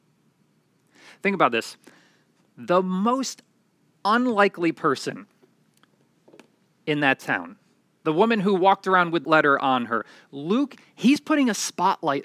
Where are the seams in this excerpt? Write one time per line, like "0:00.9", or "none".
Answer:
0:09.2